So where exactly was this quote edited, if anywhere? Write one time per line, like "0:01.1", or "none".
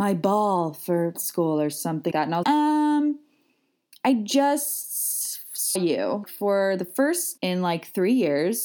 0:01.1
0:02.1
0:02.4
0:05.8
0:06.2
0:07.4

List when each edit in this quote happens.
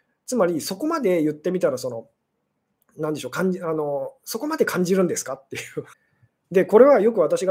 0:05.9

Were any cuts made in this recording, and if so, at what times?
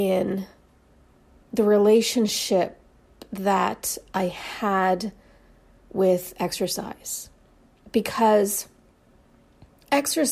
none

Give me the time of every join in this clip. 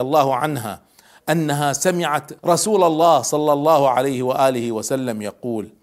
0:02.4

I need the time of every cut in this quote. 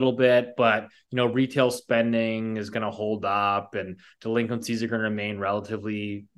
none

